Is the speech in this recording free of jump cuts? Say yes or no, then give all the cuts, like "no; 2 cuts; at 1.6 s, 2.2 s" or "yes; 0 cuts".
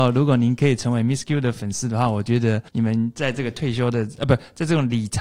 no; 1 cut; at 2.7 s